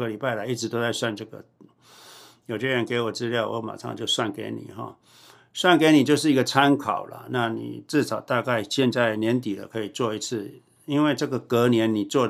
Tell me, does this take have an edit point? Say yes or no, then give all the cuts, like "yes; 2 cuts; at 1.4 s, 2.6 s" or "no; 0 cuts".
no; 0 cuts